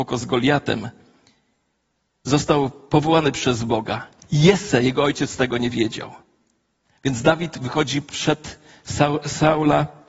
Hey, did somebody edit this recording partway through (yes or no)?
yes